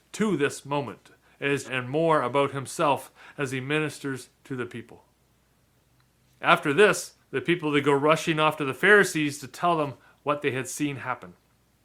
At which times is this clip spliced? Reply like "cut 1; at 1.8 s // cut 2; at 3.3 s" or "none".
cut 1; at 1.6 s // cut 2; at 7.2 s